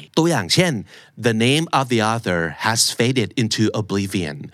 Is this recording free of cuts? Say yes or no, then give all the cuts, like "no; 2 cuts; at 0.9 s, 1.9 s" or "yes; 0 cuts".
yes; 0 cuts